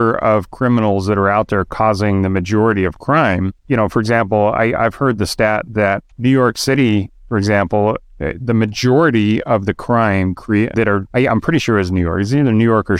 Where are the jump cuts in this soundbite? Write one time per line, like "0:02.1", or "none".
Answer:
0:03.6
0:06.1
0:10.7
0:11.1